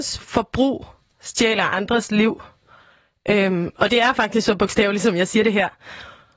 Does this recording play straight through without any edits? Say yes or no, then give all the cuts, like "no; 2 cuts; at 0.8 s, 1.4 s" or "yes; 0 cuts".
yes; 0 cuts